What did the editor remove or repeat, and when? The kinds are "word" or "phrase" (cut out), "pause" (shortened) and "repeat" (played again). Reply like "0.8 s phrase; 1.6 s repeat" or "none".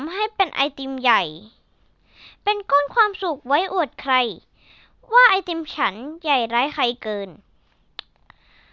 none